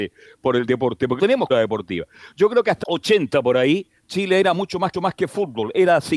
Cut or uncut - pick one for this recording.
cut